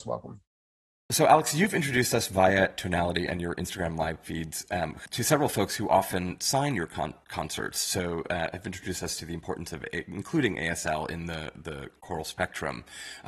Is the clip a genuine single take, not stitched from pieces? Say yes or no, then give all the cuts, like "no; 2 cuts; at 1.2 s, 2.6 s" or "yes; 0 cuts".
yes; 0 cuts